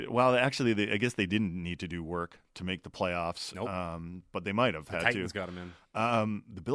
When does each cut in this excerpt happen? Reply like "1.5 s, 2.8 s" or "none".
none